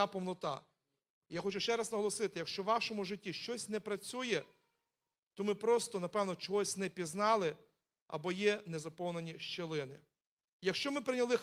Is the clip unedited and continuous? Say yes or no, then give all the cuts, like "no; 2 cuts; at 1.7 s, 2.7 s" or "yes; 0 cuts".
yes; 0 cuts